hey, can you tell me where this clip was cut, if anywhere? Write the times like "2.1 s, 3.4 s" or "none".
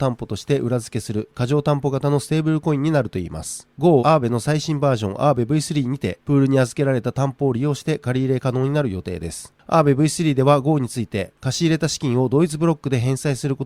4.0 s